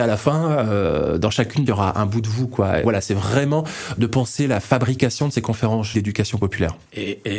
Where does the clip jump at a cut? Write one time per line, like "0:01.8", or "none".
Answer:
0:01.7
0:02.8
0:05.9